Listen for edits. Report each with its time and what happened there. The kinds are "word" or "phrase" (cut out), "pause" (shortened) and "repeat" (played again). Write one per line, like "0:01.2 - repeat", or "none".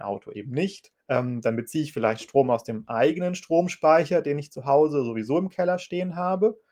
0:01.0 - pause